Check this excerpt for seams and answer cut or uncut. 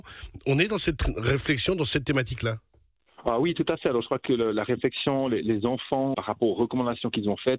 cut